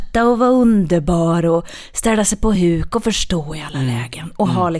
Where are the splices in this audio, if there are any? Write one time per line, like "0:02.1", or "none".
none